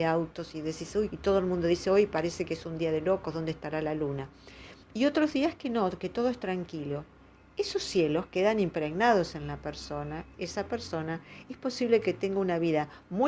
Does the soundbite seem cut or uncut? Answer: cut